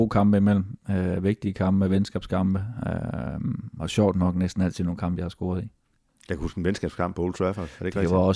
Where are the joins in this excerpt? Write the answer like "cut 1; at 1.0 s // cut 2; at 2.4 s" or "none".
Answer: none